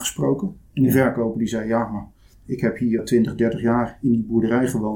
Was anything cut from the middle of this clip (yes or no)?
yes